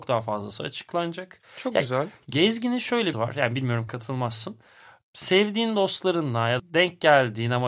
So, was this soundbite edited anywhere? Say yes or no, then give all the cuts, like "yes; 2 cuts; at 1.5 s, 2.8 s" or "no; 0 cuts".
yes; 3 cuts; at 3.1 s, 3.9 s, 6.6 s